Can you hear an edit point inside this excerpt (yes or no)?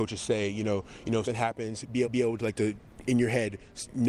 yes